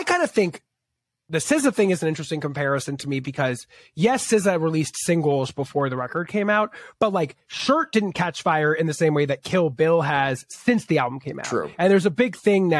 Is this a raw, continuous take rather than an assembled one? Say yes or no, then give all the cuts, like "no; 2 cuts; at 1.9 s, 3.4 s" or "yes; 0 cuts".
yes; 0 cuts